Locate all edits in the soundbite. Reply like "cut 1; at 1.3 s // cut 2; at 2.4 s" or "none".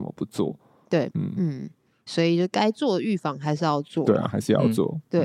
cut 1; at 1.1 s // cut 2; at 2.1 s